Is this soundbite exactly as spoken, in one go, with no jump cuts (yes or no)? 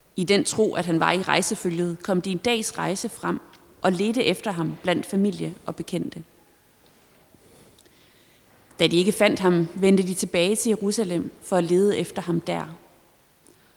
yes